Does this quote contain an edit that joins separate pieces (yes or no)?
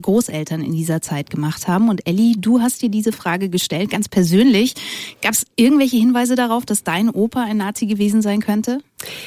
no